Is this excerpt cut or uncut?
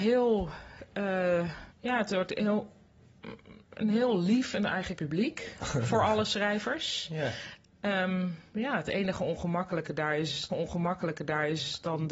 cut